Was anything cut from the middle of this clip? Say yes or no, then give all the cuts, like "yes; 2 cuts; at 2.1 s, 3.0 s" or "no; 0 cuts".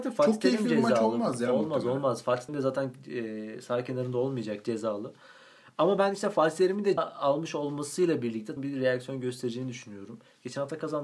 yes; 3 cuts; at 2.5 s, 7.0 s, 8.6 s